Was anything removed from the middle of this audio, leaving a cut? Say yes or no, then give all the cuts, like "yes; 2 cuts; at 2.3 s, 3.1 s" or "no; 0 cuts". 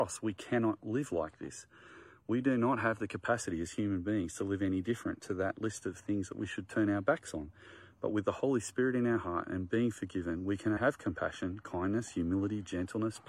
yes; 1 cut; at 10.8 s